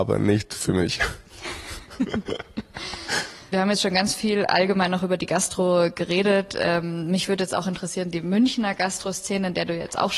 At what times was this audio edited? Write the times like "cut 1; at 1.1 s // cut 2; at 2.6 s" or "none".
cut 1; at 3.5 s